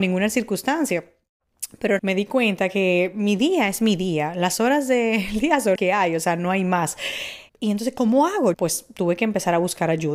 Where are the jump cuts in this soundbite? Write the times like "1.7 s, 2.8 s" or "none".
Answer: 2.0 s, 5.8 s, 7.5 s, 8.5 s